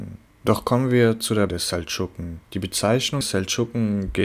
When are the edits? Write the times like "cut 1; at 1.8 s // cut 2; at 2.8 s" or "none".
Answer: cut 1; at 1.5 s // cut 2; at 3.2 s